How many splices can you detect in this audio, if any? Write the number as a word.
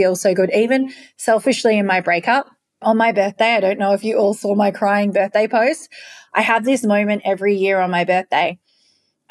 zero